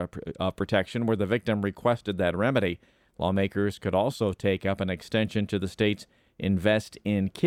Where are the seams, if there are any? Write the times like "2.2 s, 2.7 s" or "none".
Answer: none